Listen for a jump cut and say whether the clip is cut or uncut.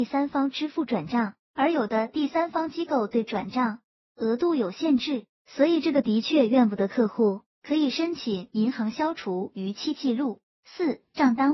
uncut